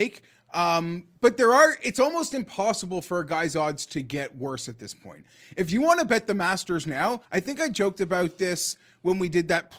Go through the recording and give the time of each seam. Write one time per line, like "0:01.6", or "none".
0:01.2
0:07.2

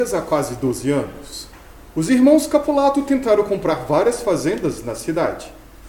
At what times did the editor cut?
none

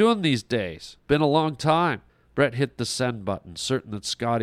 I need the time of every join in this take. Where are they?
0:01.0
0:02.1

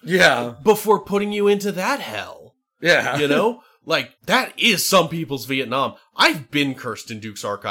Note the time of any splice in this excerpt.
0:04.2

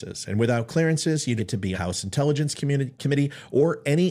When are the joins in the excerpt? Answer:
0:01.4
0:01.7
0:03.0

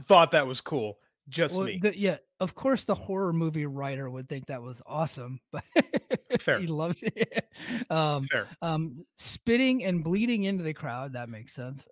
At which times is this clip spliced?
none

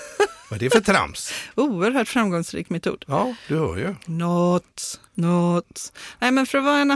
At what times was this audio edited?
0:05.1

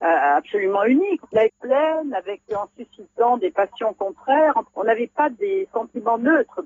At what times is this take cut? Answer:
0:01.5

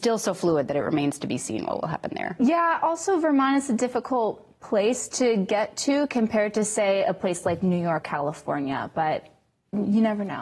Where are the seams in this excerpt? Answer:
0:08.0

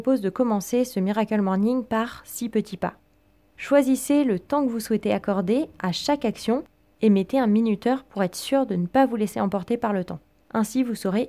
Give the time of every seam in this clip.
none

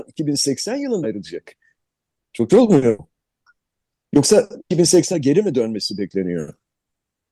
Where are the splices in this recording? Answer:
0:01.0
0:02.5
0:05.1

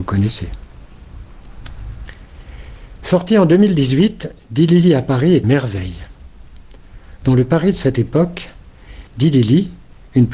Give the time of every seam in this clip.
0:05.4
0:09.1

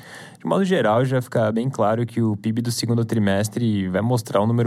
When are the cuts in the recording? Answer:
none

